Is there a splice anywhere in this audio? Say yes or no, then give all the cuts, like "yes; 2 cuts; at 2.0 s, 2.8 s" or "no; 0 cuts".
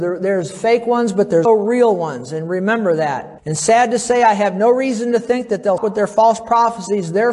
yes; 3 cuts; at 1.4 s, 3.4 s, 5.8 s